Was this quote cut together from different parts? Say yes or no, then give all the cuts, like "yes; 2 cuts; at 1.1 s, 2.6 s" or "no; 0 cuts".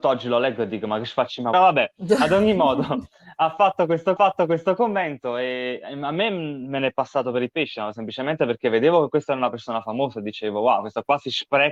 yes; 2 cuts; at 1.5 s, 4.2 s